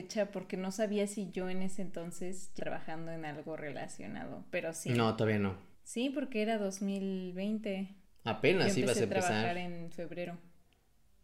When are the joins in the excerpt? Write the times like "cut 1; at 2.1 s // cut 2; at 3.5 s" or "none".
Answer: cut 1; at 2.6 s // cut 2; at 5.7 s // cut 3; at 8.0 s